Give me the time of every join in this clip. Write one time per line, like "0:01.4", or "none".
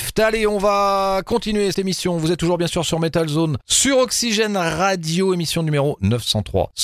0:01.7